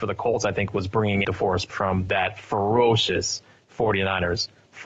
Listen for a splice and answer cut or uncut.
cut